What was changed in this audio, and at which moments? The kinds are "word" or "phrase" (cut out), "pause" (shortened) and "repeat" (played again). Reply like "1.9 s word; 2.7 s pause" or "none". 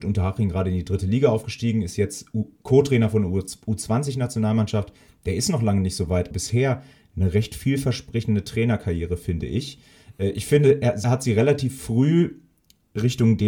6.3 s word; 11.0 s word